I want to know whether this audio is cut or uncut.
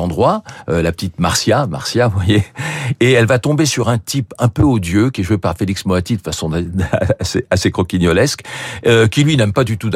uncut